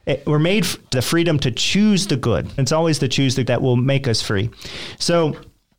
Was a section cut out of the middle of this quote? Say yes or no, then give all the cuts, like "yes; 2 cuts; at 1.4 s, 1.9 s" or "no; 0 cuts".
yes; 3 cuts; at 0.9 s, 2.6 s, 3.5 s